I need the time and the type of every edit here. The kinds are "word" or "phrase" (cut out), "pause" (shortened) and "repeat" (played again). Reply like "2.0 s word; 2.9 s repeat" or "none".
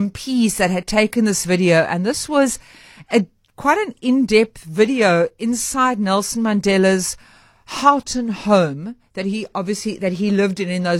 none

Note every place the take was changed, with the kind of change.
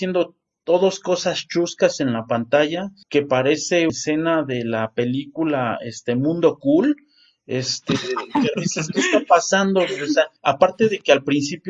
3.0 s pause; 3.9 s word; 8.5 s word; 10.4 s pause

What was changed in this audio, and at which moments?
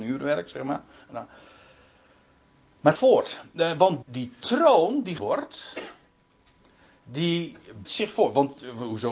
2.9 s word; 4.0 s word; 5.2 s word; 7.8 s word

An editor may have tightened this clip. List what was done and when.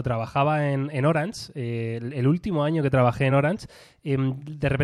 none

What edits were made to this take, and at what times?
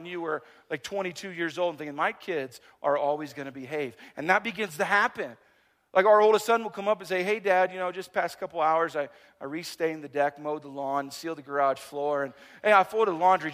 none

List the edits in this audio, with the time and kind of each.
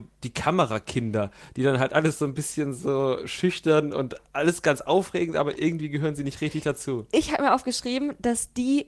none

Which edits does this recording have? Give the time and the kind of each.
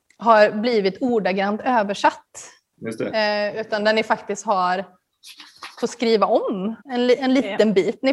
6.8 s pause

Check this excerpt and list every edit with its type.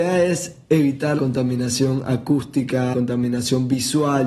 1.2 s word; 2.9 s word

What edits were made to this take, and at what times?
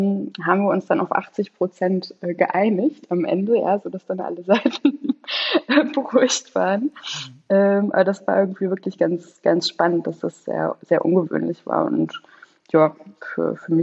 none

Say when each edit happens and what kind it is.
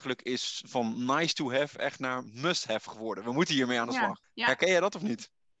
4.2 s pause

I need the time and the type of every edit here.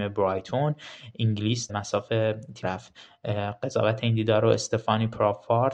1.7 s word; 2.6 s word

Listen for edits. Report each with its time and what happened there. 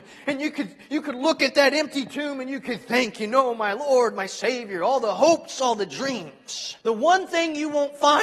6.8 s pause

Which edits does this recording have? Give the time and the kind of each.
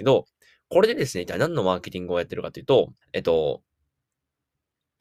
3.0 s pause

